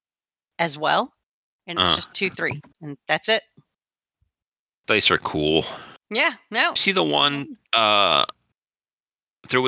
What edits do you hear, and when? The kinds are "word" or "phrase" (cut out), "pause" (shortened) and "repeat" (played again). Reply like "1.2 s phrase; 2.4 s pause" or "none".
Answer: 2.1 s word; 6.8 s phrase